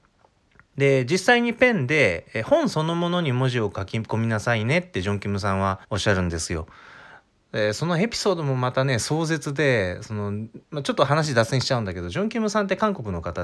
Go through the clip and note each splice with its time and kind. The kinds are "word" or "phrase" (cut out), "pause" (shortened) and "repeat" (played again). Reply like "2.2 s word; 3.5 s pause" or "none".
5.8 s pause; 10.6 s pause